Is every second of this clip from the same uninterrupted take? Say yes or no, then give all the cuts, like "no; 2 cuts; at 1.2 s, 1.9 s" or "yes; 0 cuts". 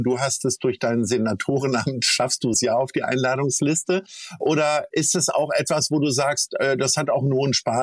no; 1 cut; at 2.5 s